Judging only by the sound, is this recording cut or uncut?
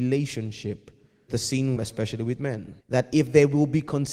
cut